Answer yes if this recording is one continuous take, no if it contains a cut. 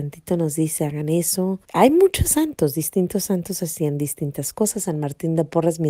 no